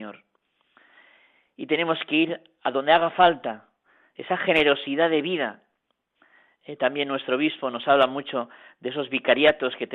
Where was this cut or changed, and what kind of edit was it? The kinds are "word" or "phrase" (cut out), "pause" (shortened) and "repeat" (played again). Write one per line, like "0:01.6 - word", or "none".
none